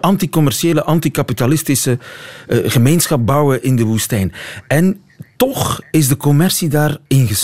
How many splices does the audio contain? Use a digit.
0